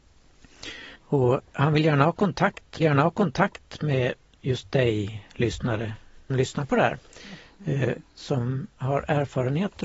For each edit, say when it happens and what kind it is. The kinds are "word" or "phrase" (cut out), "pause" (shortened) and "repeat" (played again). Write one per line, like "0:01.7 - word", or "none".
0:01.0 - pause
0:02.8 - repeat
0:06.3 - phrase